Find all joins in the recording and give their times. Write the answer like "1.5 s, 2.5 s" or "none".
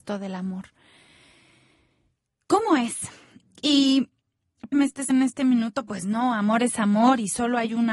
4.7 s, 5.1 s